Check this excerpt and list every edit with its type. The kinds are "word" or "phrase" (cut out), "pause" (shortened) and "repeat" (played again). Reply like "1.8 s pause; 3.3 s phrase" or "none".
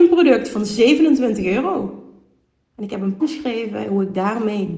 3.2 s word

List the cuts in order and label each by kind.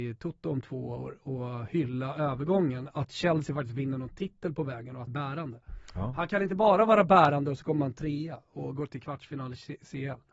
1.2 s word; 5.1 s word

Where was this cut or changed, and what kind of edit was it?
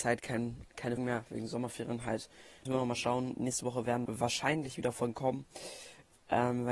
1.0 s word; 2.7 s word; 4.1 s word

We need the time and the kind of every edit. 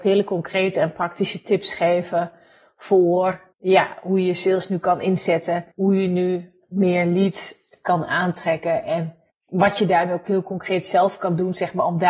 3.5 s pause; 5.7 s pause; 9.3 s pause

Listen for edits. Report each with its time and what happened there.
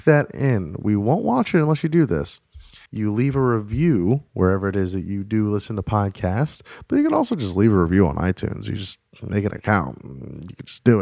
2.9 s pause

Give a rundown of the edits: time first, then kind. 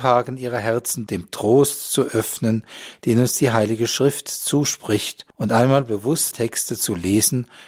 1.1 s word; 5.3 s pause; 6.3 s word

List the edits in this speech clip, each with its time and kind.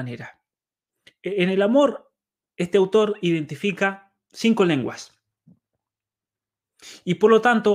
none

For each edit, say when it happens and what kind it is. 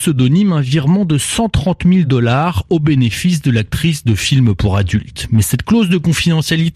none

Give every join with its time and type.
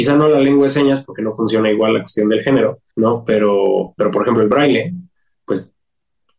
2.9 s pause; 4.0 s word

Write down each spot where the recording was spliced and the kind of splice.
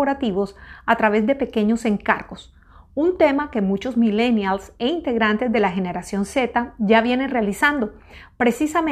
none

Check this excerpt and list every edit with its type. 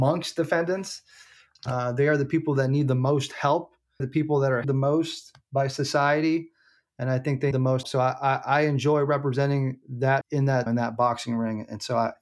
4.0 s word; 4.6 s word; 7.5 s word; 7.8 s word; 10.2 s word; 10.7 s word

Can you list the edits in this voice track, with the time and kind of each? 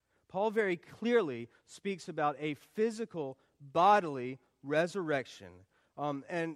none

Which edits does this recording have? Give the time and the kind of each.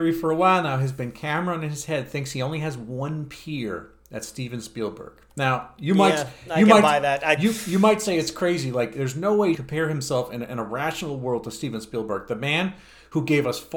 9.5 s phrase

